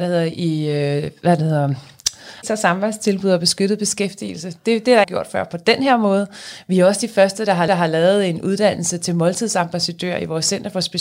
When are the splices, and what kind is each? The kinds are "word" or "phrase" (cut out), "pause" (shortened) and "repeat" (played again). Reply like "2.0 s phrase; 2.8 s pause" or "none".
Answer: 2.4 s word; 5.0 s phrase; 7.7 s repeat